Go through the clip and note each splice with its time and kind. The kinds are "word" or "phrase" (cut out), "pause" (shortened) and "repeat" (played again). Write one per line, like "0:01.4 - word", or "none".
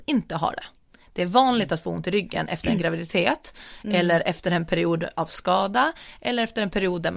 none